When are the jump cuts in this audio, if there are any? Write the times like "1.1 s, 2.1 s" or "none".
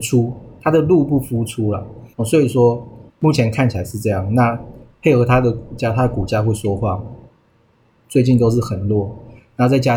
2.1 s, 3.1 s